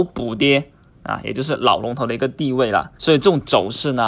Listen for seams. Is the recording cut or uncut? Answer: cut